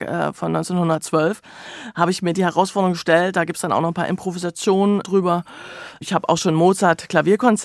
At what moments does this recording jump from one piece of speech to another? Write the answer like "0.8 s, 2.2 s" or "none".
5.0 s